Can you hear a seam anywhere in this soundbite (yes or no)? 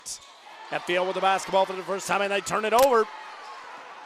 no